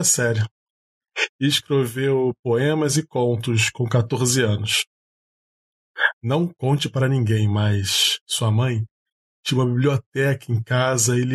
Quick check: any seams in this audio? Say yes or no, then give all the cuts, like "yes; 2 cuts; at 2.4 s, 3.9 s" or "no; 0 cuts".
no; 0 cuts